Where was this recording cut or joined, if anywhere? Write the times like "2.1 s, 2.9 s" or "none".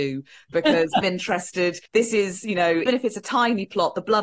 1.0 s, 1.9 s, 2.9 s